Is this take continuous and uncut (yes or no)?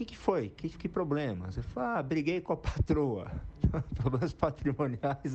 yes